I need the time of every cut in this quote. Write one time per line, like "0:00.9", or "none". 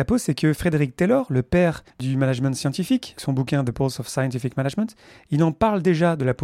0:01.9
0:03.2
0:03.7

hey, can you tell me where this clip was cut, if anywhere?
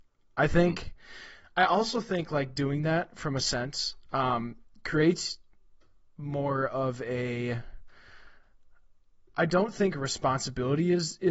none

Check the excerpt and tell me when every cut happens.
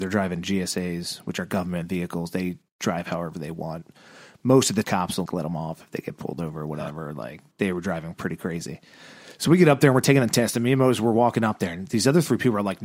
0:04.8
0:05.3

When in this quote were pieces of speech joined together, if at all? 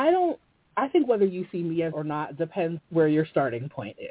0:01.9
0:02.8

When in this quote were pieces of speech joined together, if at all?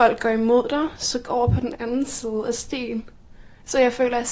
0:01.2

